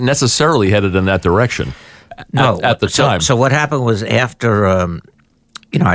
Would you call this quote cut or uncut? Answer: uncut